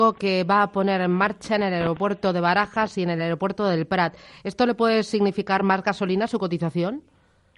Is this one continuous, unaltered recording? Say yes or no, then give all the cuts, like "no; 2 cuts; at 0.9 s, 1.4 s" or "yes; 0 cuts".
yes; 0 cuts